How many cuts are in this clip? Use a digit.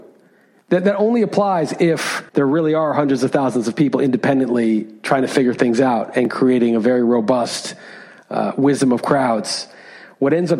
1